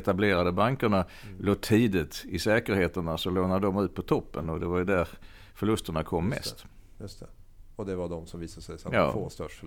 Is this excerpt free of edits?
yes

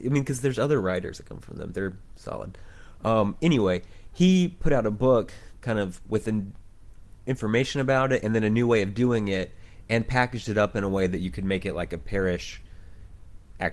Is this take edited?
no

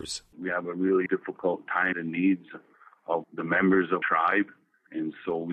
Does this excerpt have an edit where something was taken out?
yes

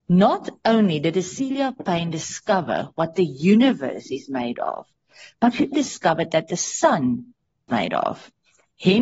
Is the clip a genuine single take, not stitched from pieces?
no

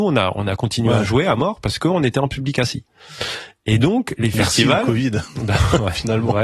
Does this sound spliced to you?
no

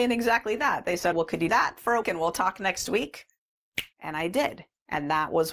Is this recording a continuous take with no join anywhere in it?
no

